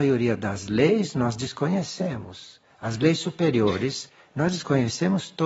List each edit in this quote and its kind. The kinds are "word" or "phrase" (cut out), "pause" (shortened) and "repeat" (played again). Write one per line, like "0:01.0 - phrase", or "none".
none